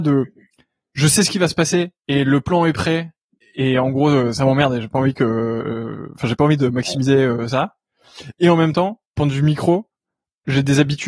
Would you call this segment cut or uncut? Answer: cut